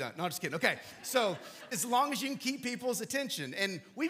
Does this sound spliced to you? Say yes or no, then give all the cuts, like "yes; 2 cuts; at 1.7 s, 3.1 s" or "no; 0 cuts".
yes; 1 cut; at 1.7 s